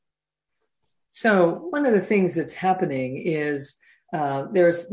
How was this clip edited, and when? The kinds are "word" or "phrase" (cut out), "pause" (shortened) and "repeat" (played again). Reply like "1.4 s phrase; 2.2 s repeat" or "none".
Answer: none